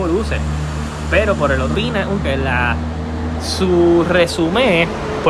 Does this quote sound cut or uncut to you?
cut